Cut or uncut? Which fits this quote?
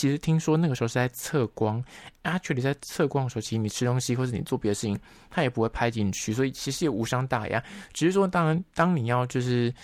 uncut